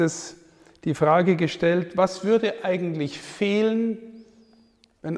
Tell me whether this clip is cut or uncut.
uncut